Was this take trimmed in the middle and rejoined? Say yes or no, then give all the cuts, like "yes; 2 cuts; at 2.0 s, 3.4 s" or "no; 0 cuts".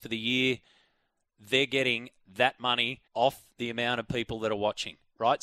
yes; 1 cut; at 3.1 s